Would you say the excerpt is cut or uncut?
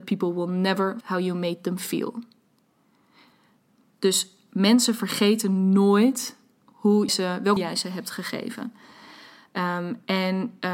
cut